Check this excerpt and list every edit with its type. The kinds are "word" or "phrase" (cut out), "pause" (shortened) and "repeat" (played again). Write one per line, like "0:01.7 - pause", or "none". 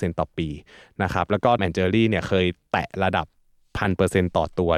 0:01.6 - word